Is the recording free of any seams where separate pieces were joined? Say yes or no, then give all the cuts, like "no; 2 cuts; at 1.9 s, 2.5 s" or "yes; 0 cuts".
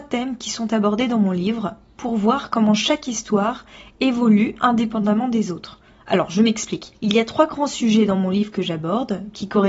yes; 0 cuts